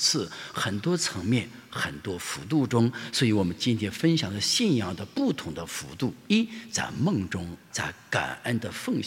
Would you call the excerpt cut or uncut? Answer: cut